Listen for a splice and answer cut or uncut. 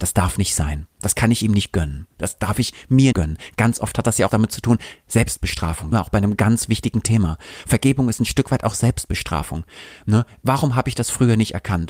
cut